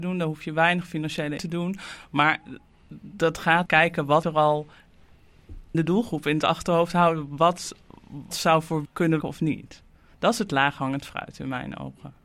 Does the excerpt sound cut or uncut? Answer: cut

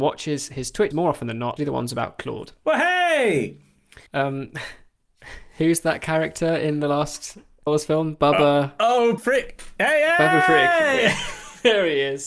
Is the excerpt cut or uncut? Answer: cut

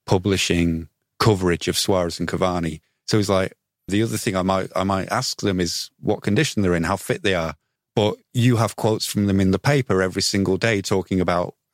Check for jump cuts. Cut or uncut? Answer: uncut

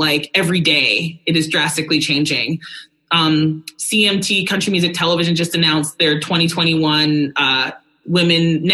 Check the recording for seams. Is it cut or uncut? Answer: uncut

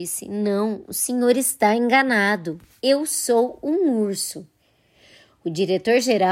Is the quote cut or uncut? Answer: uncut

